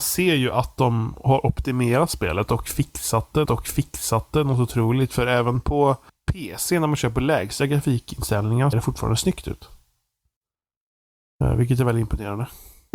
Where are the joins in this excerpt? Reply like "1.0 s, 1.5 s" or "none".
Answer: 3.4 s, 6.1 s, 8.7 s